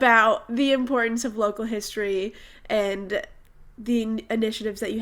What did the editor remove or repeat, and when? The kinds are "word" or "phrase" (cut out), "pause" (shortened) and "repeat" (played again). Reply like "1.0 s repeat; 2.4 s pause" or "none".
none

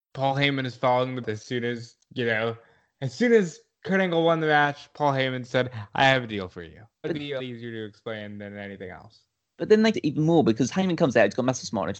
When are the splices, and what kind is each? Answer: 1.2 s word; 7.0 s word; 7.4 s word; 9.9 s word

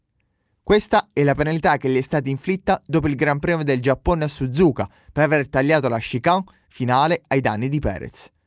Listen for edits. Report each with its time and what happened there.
none

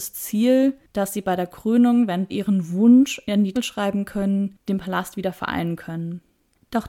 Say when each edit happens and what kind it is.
2.3 s word; 3.5 s word

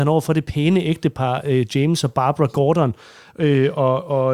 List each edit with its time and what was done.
none

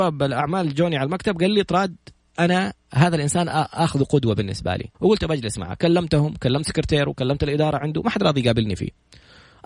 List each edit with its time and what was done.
4.9 s pause

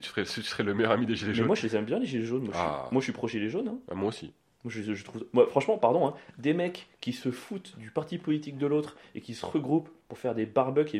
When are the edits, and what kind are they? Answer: none

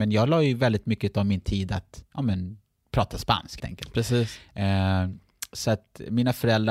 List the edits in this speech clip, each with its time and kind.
3.6 s word

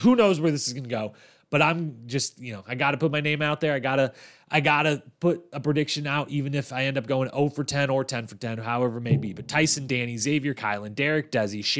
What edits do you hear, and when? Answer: none

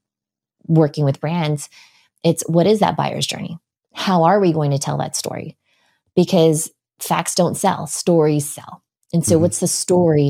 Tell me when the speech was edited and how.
none

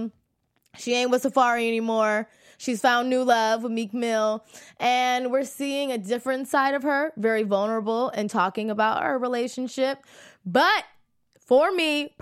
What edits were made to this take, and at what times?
none

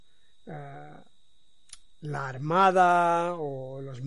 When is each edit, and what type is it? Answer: 1.9 s pause

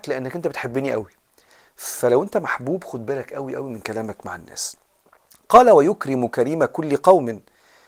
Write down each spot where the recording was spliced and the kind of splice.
none

